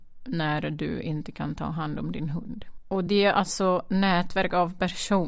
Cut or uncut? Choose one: uncut